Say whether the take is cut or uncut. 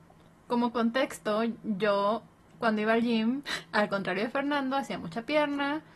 uncut